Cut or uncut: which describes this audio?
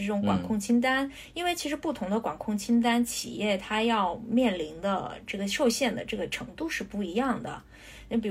uncut